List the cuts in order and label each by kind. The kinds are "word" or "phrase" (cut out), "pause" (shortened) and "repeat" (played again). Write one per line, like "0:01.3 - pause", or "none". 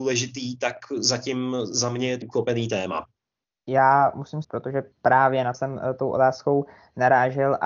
0:02.2 - word
0:03.4 - pause
0:04.4 - word
0:04.9 - pause
0:05.5 - word